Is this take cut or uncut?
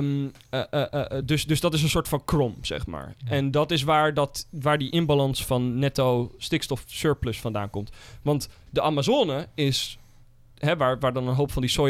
uncut